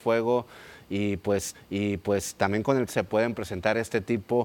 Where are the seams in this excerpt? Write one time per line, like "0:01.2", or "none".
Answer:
0:01.5
0:02.9